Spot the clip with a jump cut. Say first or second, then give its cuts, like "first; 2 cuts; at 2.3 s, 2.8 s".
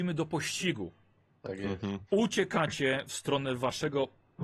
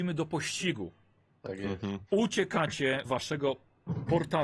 second; 1 cut; at 3.1 s